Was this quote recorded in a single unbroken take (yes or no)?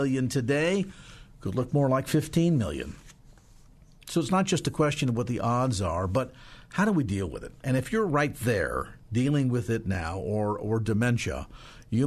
yes